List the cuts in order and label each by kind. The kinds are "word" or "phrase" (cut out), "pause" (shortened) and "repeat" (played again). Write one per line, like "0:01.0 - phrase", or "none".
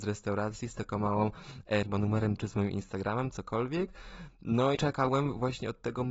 0:01.8 - phrase
0:02.4 - word
0:04.7 - word